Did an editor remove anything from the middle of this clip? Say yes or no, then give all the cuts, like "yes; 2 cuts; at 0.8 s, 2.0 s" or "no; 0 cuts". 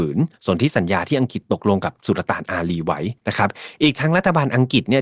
yes; 1 cut; at 3.2 s